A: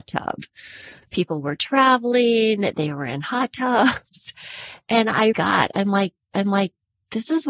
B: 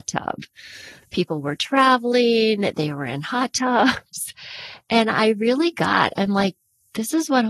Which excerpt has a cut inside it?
A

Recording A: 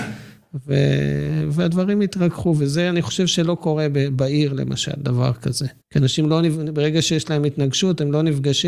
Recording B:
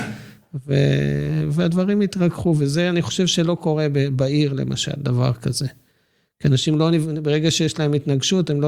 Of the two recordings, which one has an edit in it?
A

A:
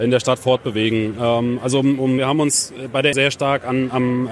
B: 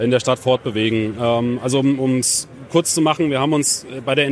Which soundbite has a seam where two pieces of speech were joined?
A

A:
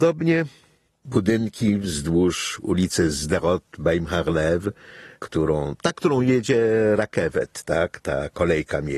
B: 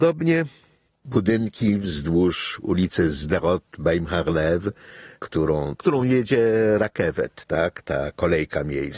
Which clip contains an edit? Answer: B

